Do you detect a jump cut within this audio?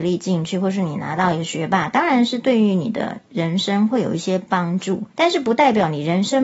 yes; 1 cut; at 5.1 s

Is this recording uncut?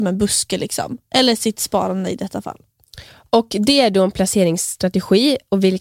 no; 1 cut; at 3.1 s

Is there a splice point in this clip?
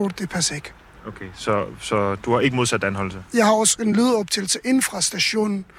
no; 0 cuts

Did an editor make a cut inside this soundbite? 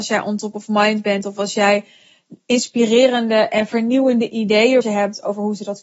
yes; 1 cut; at 4.8 s

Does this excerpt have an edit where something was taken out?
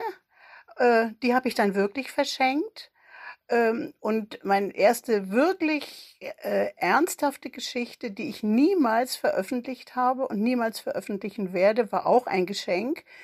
no; 0 cuts

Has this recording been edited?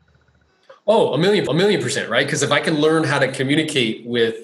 yes; 1 cut; at 1.5 s

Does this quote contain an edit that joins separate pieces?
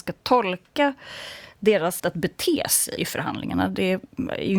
yes; 2 cuts; at 2.0 s, 3.0 s

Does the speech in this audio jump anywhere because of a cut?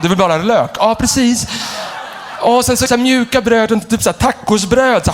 yes; 1 cut; at 2.9 s

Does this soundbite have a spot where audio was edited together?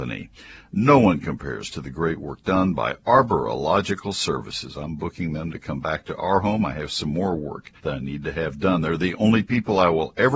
yes; 1 cut; at 7.8 s

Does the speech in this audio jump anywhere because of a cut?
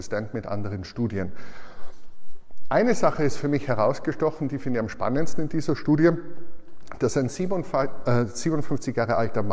no; 0 cuts

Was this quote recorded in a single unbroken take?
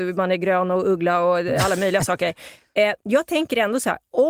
yes; 0 cuts

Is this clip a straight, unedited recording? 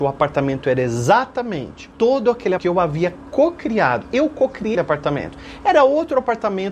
no; 3 cuts; at 1.9 s, 2.6 s, 4.7 s

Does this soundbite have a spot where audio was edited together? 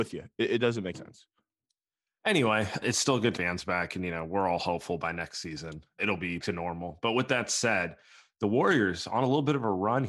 yes; 5 cuts; at 0.9 s, 2.8 s, 3.3 s, 6.0 s, 6.4 s

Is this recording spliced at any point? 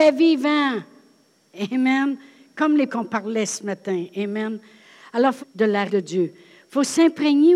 yes; 3 cuts; at 2.9 s, 5.4 s, 5.9 s

